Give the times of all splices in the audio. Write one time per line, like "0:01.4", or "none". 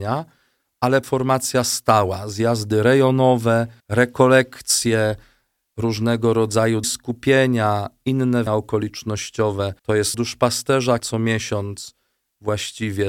0:01.0
0:03.8
0:06.8
0:08.5
0:09.8
0:10.1
0:11.0